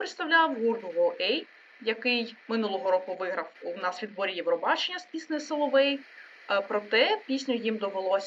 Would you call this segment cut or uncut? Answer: uncut